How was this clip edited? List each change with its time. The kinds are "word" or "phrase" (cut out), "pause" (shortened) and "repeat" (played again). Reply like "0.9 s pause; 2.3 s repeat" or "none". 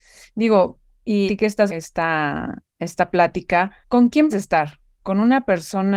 1.3 s word; 1.7 s word; 2.7 s pause; 3.8 s pause; 4.3 s word